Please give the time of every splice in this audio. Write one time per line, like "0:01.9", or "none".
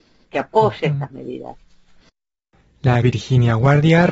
0:03.0